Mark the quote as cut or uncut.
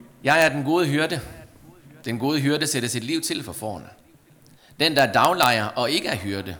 uncut